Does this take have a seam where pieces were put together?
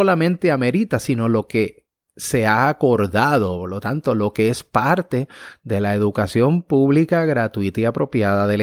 no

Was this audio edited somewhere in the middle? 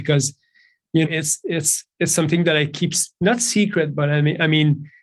yes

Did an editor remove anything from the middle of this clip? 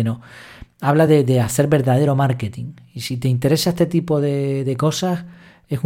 no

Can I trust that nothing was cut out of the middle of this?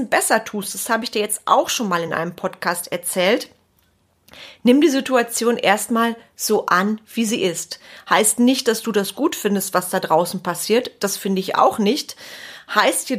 yes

